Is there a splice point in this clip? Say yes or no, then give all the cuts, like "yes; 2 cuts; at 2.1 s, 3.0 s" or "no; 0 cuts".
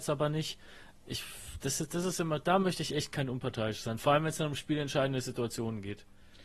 no; 0 cuts